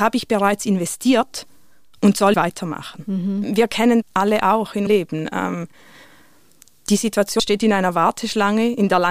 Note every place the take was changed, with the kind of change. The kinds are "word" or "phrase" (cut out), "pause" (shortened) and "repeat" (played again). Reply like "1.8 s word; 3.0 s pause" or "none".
2.3 s word; 4.0 s word; 4.9 s word; 7.4 s word